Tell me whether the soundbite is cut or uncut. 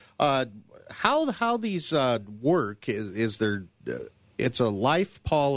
uncut